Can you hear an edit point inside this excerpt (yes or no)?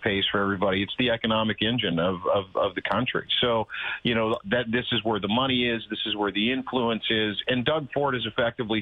no